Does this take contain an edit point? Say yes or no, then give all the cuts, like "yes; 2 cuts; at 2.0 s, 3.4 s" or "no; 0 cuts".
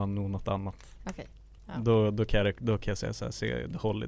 no; 0 cuts